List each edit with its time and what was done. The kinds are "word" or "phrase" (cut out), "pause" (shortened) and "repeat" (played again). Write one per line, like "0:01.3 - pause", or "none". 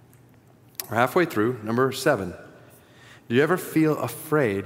none